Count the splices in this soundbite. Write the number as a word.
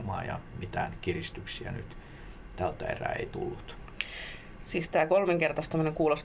zero